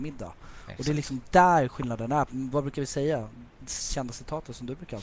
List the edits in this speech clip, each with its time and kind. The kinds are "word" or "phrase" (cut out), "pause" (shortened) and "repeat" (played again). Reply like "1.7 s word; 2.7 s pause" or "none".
2.3 s word